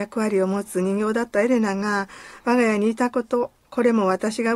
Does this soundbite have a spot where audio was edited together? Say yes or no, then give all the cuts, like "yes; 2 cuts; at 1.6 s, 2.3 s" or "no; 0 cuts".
yes; 1 cut; at 3.6 s